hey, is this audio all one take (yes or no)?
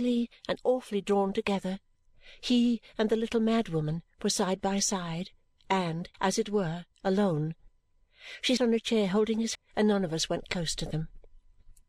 no